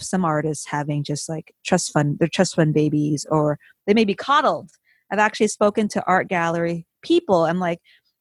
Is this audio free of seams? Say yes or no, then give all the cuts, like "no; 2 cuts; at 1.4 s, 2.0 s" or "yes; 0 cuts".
yes; 0 cuts